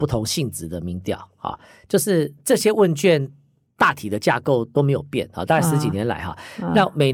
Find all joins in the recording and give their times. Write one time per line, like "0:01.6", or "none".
none